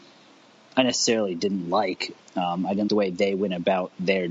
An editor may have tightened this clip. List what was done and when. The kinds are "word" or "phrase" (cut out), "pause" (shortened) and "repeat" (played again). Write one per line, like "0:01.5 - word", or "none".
0:02.2 - word
0:02.9 - word